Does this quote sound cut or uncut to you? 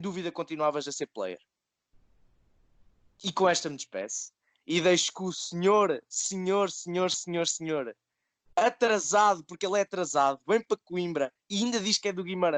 uncut